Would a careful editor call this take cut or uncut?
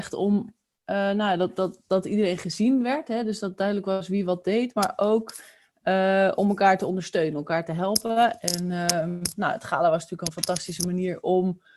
uncut